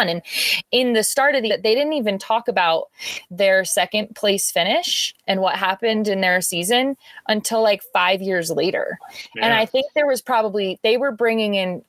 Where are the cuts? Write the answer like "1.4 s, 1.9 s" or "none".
1.5 s